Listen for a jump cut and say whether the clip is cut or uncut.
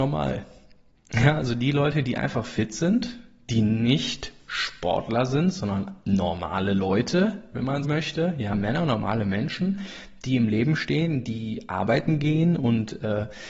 cut